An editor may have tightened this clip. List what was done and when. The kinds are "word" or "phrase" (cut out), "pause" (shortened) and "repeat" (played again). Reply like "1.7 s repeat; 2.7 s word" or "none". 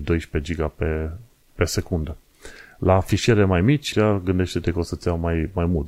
3.9 s word